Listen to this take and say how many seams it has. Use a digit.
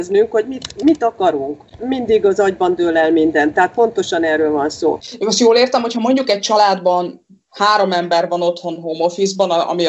1